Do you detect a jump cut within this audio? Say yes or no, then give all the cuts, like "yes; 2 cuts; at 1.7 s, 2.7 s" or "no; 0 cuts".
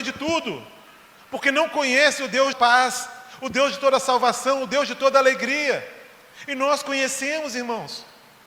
yes; 1 cut; at 2.5 s